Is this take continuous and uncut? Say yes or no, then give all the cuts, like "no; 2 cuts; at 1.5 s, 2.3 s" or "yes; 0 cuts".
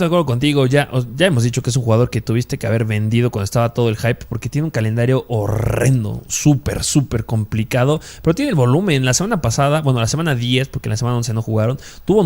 yes; 0 cuts